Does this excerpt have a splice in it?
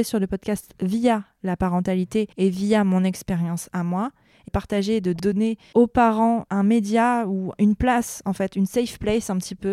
yes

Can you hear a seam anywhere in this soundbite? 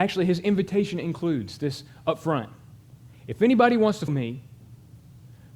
yes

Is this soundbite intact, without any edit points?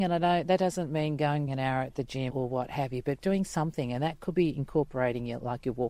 no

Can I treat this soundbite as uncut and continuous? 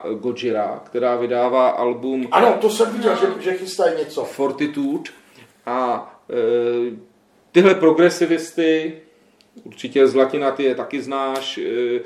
yes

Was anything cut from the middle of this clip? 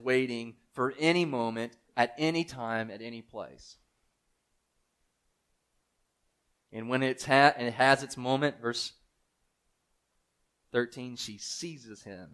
no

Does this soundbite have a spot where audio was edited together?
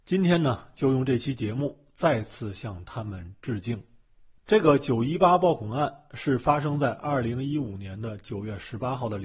no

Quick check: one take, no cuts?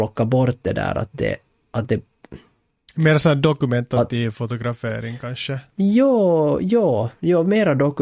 yes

